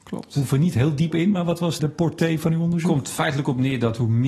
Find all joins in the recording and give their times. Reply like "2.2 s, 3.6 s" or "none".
1.1 s, 1.8 s